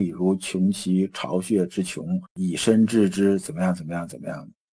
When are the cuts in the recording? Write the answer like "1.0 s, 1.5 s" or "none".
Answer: 2.3 s